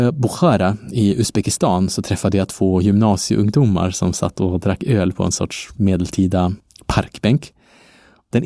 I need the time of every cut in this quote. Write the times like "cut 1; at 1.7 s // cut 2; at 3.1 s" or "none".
none